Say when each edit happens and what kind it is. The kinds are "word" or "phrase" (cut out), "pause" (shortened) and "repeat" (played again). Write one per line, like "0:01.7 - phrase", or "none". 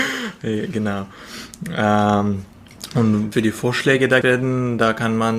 0:03.3 - word
0:04.2 - word